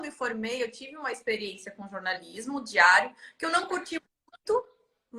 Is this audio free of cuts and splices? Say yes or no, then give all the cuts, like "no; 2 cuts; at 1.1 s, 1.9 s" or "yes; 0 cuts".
yes; 0 cuts